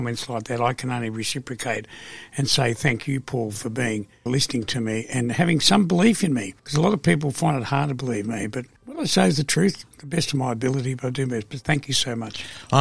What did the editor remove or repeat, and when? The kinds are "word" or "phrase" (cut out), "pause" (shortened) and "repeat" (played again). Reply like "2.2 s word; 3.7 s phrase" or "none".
4.3 s word; 6.6 s pause; 8.8 s pause